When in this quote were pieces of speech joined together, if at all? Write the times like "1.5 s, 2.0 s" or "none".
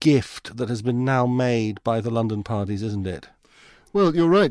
none